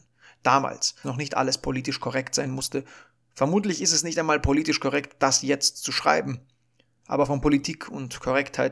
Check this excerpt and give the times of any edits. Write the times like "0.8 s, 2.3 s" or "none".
1.0 s